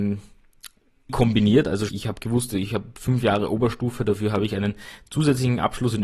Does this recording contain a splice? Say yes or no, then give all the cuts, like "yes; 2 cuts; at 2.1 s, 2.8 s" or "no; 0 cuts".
yes; 2 cuts; at 1.1 s, 1.9 s